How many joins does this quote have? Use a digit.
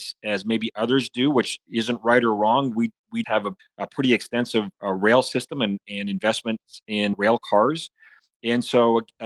4